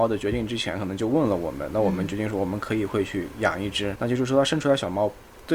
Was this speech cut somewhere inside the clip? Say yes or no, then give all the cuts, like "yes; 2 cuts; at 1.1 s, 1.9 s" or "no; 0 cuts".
yes; 1 cut; at 3.9 s